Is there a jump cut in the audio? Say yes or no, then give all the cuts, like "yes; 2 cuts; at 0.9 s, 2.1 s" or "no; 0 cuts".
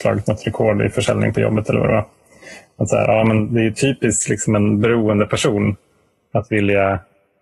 no; 0 cuts